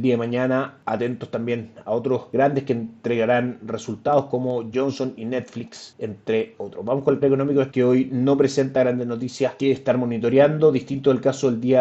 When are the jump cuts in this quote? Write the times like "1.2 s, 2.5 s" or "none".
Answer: 4.7 s, 7.2 s, 7.7 s

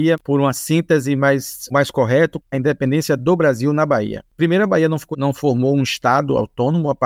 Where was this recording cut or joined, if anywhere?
1.7 s, 2.5 s, 5.1 s

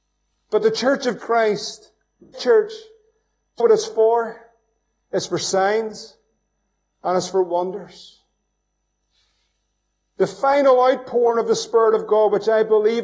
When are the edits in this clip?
1.2 s, 2.3 s, 3.6 s

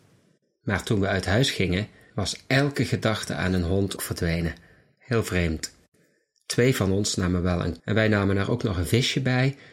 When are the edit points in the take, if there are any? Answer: 4.0 s, 7.8 s

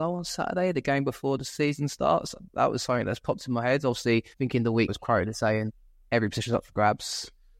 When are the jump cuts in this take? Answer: 4.3 s, 4.9 s

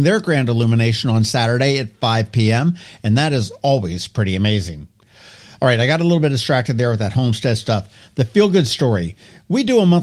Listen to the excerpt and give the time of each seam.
none

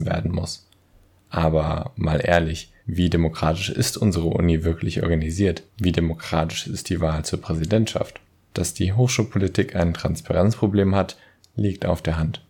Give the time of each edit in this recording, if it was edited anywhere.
2.8 s, 5.7 s, 8.3 s

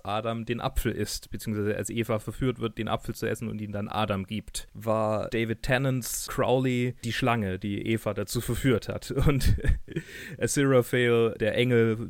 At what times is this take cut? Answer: none

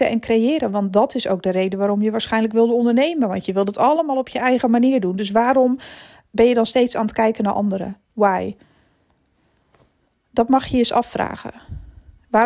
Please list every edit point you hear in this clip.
none

